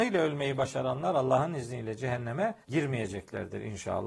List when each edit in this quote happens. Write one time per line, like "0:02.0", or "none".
0:02.6